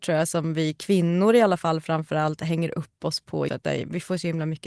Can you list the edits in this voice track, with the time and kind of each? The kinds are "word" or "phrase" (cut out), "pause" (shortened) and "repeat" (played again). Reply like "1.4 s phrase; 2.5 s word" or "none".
3.5 s word